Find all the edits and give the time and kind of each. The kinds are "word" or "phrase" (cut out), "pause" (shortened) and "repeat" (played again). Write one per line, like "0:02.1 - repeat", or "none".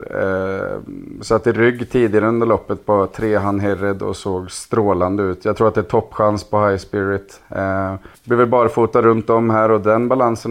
0:08.1 - pause